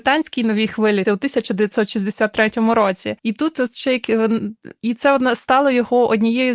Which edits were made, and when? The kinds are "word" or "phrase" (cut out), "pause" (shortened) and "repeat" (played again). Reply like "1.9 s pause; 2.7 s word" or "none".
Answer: 1.0 s phrase; 3.2 s pause